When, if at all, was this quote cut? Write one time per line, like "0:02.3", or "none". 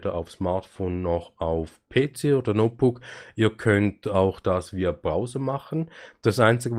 none